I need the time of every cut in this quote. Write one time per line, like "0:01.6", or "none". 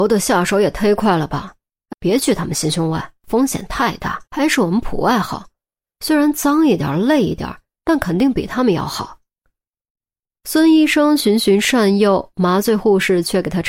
0:01.9
0:03.2
0:04.3